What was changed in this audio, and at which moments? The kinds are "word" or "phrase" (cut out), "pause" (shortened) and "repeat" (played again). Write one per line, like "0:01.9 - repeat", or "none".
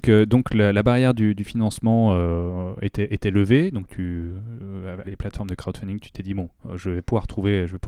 0:05.0 - phrase